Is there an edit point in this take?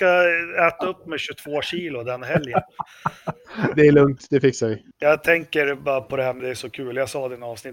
yes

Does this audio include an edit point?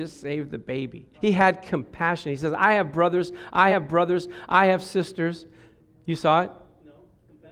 yes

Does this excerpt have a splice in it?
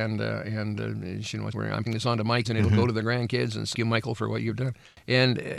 yes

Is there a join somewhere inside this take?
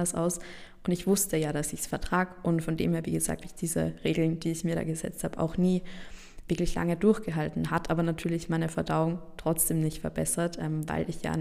yes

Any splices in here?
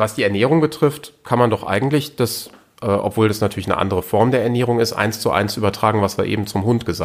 no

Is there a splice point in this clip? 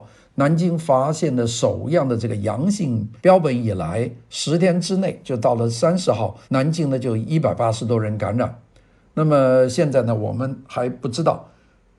yes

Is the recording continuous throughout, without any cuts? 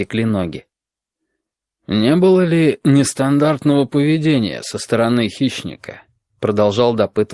yes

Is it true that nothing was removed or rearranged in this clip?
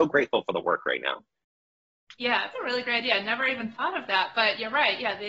no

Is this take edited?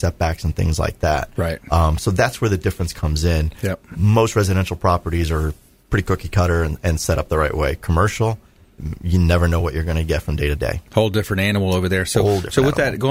no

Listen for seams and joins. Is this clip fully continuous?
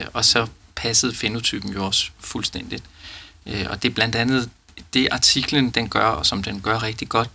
no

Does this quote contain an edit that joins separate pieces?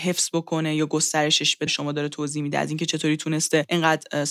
yes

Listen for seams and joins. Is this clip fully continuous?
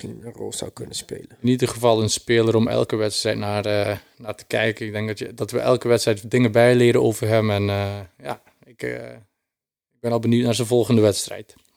yes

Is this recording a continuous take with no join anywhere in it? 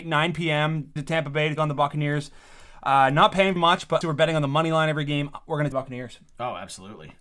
no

